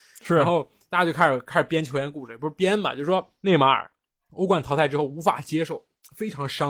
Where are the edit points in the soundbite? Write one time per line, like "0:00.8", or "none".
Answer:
0:04.1